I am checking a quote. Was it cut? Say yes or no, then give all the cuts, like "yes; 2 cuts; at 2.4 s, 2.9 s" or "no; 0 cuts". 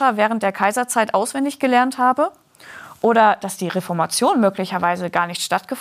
no; 0 cuts